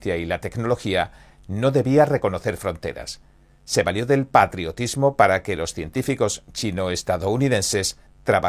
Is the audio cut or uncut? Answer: uncut